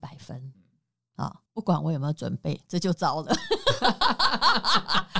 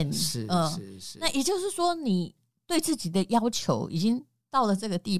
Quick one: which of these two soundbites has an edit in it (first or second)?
first